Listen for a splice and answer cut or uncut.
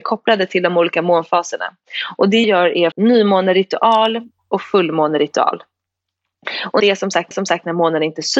cut